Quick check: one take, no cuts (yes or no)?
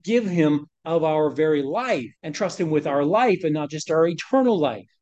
no